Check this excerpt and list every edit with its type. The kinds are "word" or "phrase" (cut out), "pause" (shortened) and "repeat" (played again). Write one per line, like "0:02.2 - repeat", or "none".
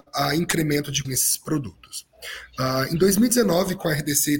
0:01.0 - word